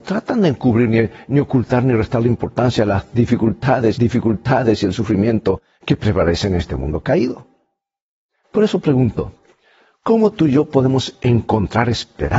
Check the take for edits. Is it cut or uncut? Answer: cut